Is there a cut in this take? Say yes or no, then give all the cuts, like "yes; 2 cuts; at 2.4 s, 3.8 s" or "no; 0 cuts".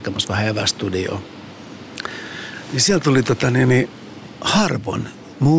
no; 0 cuts